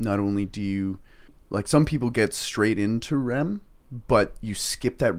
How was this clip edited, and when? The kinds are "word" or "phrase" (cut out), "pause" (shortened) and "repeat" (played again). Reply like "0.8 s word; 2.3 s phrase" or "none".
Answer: 1.3 s pause